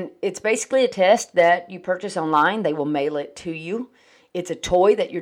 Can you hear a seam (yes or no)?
no